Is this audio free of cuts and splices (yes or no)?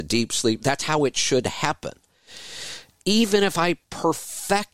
yes